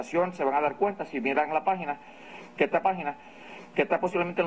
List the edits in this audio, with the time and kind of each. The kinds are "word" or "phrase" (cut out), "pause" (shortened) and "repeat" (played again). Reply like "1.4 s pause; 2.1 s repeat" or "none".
2.8 s repeat